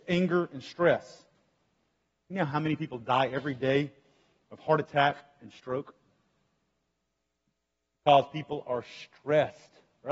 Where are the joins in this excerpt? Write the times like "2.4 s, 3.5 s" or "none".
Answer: none